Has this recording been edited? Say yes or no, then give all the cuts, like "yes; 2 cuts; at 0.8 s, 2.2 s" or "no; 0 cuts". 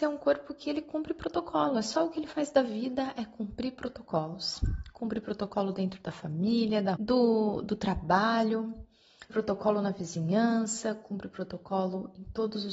yes; 2 cuts; at 7.0 s, 9.3 s